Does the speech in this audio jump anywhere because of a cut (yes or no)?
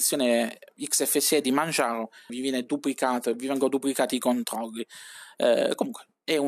yes